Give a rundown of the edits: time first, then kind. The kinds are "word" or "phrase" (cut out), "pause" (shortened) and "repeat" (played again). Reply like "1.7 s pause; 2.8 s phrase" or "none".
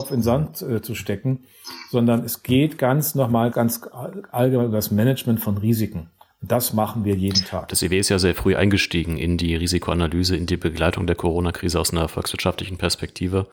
3.5 s word